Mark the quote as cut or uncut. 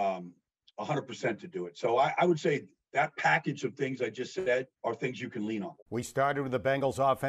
cut